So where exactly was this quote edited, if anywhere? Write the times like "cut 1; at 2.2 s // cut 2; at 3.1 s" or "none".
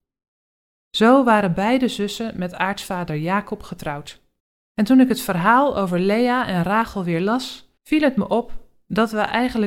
cut 1; at 4.4 s // cut 2; at 7.8 s